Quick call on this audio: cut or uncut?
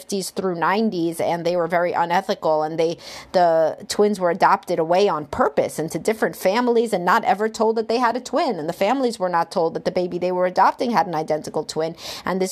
uncut